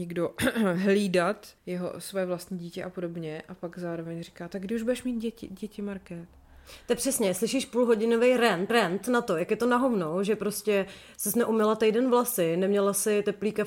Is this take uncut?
no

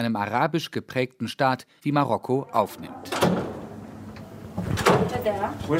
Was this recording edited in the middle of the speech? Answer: no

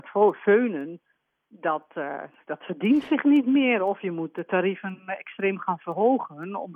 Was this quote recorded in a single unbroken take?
yes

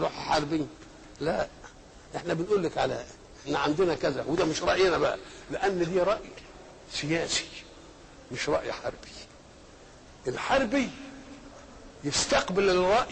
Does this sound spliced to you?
no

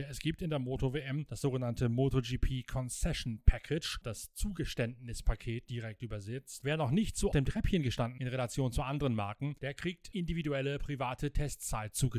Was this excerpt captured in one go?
no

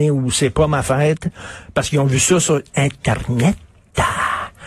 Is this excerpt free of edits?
yes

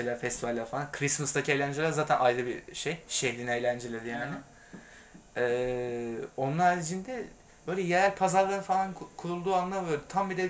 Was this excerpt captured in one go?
yes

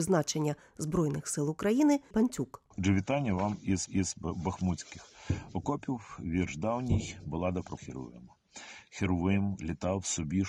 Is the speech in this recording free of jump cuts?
no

